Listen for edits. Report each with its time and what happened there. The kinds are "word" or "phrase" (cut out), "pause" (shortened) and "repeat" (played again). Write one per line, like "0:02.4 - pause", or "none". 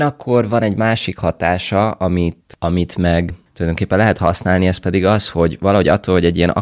none